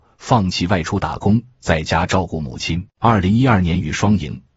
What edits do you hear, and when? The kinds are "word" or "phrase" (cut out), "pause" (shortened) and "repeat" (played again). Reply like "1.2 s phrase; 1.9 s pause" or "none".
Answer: 2.9 s pause